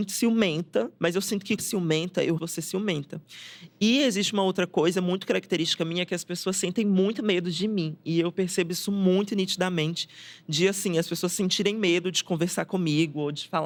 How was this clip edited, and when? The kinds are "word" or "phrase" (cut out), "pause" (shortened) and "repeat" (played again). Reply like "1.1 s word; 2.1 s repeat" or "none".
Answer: 1.0 s pause; 1.6 s phrase; 2.4 s word